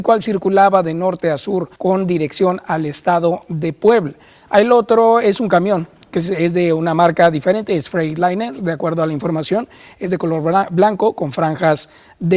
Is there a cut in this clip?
yes; 1 cut; at 1.8 s

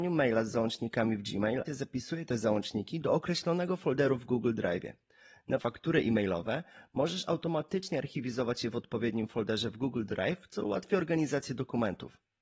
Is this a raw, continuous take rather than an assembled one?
no; 2 cuts; at 1.7 s, 5.6 s

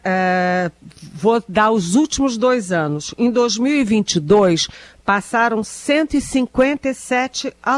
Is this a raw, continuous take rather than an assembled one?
yes; 0 cuts

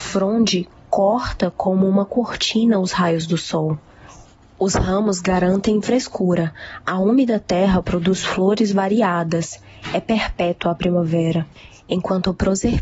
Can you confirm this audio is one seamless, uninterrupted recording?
yes; 0 cuts

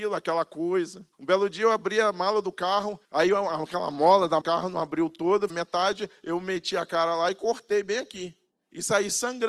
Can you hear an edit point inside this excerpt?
yes; 4 cuts; at 1.1 s, 3.0 s, 4.4 s, 5.5 s

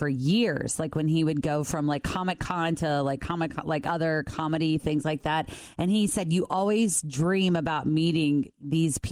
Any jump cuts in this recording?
no; 0 cuts

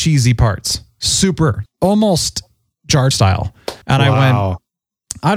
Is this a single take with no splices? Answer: no; 3 cuts; at 1.7 s, 3.1 s, 3.8 s

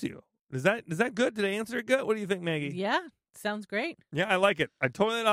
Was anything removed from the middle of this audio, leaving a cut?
no; 0 cuts

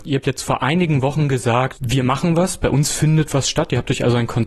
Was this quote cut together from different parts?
yes; 1 cut; at 1.8 s

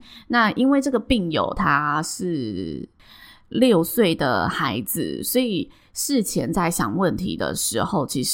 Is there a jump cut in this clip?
no; 0 cuts

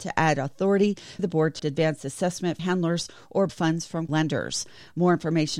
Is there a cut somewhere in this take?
yes; 5 cuts; at 1.2 s, 1.6 s, 2.6 s, 3.5 s, 4.1 s

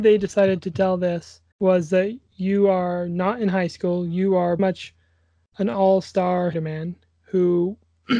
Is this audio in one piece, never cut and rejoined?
no; 3 cuts; at 1.5 s, 4.6 s, 6.5 s

